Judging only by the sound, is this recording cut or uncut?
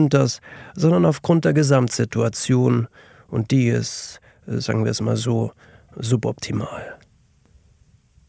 uncut